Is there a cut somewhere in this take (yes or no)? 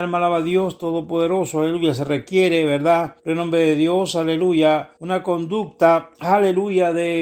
yes